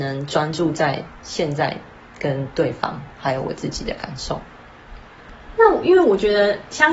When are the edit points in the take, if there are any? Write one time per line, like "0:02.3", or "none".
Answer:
none